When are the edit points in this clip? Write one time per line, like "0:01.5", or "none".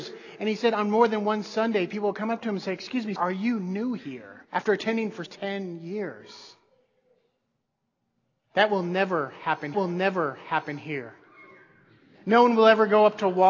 0:03.2
0:04.4
0:05.3
0:09.7